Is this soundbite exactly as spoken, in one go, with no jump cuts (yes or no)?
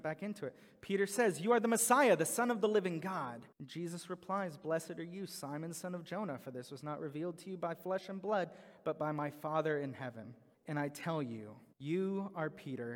no